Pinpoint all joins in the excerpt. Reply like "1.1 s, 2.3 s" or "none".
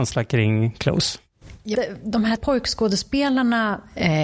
1.7 s, 2.4 s